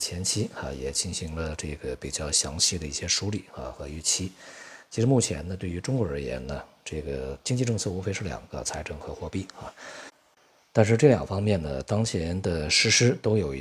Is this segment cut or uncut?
uncut